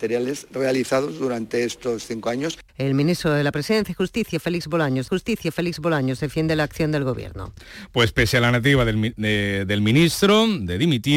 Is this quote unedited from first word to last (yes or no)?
no